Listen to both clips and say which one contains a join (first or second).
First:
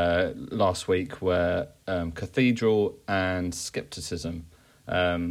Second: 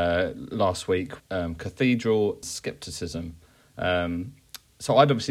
second